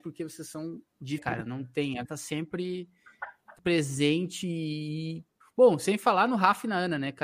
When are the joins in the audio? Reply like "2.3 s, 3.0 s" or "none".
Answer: 1.2 s, 2.0 s, 3.6 s, 5.4 s